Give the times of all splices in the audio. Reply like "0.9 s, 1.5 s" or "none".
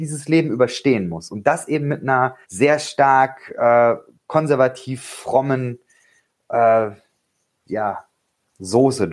2.4 s